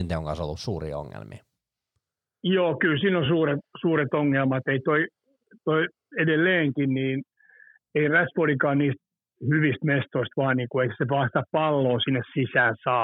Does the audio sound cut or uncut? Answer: uncut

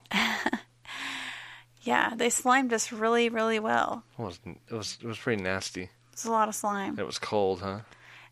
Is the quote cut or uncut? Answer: uncut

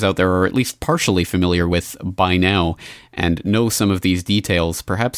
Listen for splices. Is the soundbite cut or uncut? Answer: uncut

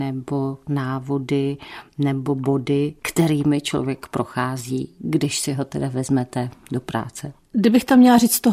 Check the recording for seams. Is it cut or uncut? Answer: uncut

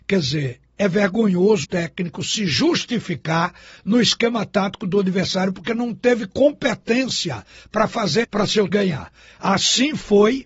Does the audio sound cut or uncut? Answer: cut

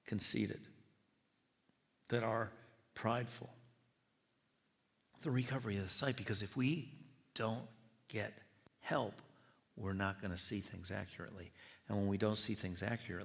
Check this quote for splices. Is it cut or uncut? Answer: uncut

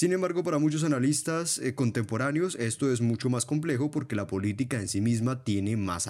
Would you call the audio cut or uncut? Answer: uncut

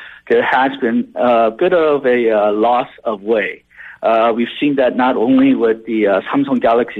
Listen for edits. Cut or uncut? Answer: uncut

